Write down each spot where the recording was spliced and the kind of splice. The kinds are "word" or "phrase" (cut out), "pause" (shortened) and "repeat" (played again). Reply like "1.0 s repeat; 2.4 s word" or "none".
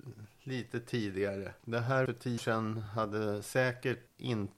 2.1 s word; 2.4 s word